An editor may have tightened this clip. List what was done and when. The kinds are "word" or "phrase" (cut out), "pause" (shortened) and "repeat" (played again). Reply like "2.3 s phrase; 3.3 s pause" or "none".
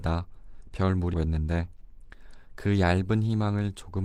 1.1 s phrase